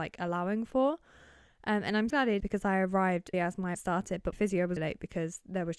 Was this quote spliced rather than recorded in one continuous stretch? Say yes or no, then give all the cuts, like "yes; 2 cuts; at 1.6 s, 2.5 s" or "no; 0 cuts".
yes; 6 cuts; at 2.1 s, 2.4 s, 3.3 s, 3.7 s, 4.3 s, 4.8 s